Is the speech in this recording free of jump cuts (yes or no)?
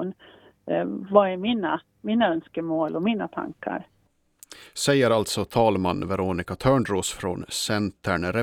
yes